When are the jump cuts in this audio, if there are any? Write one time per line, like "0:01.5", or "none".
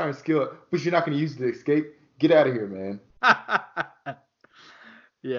0:03.1

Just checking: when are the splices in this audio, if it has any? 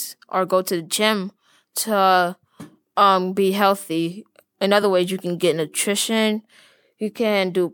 none

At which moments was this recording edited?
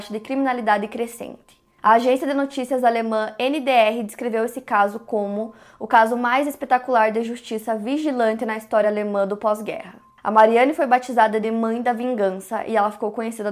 none

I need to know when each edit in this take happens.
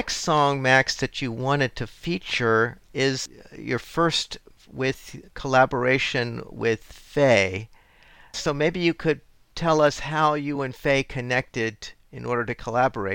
none

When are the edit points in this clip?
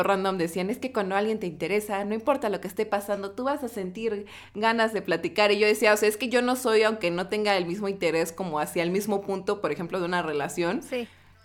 none

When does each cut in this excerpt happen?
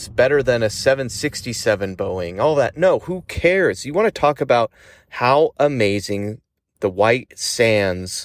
none

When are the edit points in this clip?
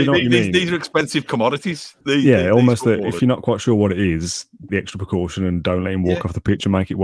0:02.0
0:03.2
0:04.7

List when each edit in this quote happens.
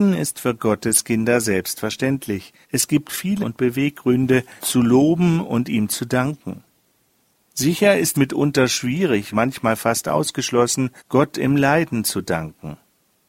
0:02.6
0:03.4
0:04.6
0:08.1
0:09.3
0:11.0

